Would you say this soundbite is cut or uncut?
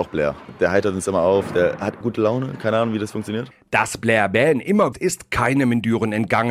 cut